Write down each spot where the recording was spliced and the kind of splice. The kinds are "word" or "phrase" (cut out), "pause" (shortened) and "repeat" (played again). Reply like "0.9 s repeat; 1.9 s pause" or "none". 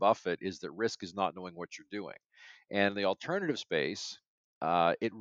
none